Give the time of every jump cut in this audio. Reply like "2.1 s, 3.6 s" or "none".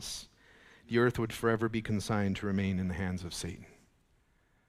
none